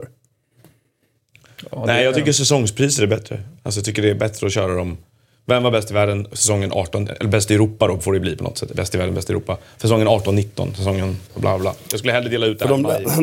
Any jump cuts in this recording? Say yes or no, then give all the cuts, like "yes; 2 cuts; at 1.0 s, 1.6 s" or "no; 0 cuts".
no; 0 cuts